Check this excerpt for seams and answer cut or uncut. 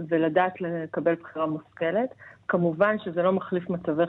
uncut